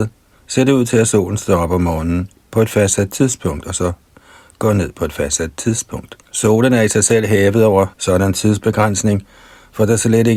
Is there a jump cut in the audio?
yes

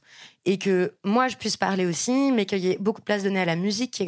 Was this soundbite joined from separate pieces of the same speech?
no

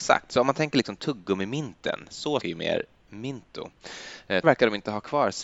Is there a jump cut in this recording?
yes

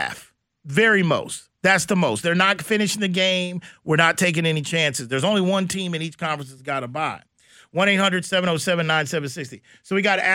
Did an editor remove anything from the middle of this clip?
no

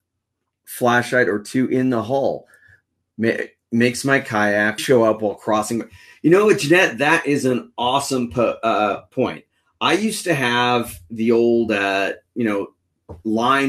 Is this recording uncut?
no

